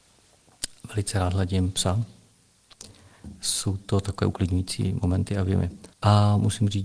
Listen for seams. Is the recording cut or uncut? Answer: cut